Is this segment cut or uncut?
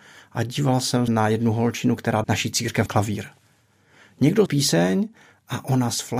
cut